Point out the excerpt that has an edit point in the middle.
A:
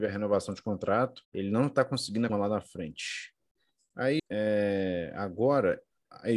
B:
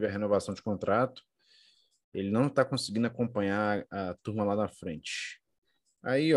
A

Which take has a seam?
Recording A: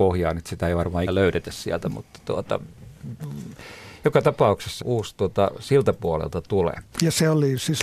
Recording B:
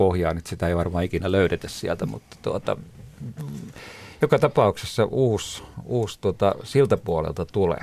A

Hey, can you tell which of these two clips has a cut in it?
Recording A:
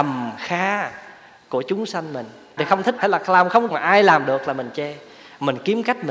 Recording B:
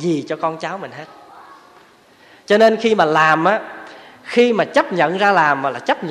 A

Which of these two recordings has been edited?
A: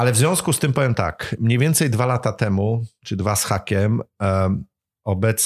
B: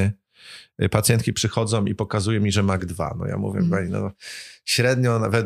B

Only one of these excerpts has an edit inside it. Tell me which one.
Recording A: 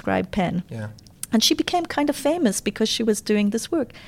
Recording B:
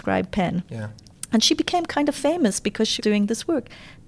B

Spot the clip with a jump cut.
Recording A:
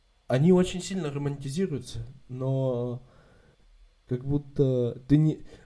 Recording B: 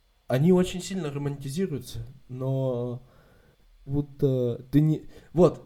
B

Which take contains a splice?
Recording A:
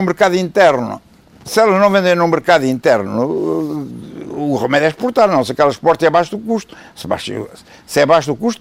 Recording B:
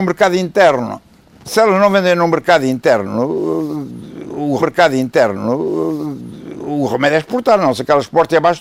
B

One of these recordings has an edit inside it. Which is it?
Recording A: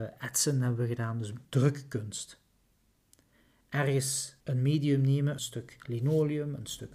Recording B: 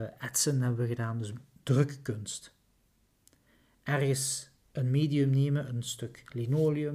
A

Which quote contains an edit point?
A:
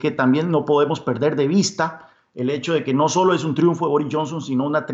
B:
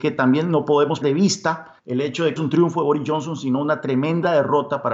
B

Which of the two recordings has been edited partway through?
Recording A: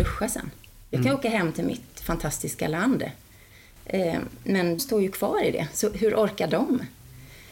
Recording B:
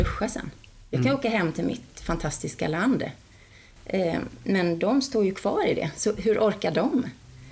A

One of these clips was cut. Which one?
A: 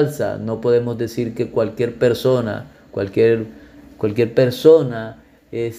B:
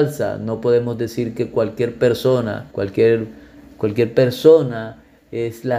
B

